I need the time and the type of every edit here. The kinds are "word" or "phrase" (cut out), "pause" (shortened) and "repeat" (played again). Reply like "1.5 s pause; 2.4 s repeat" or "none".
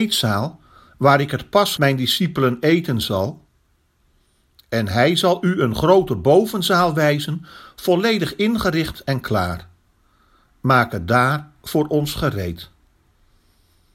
1.8 s phrase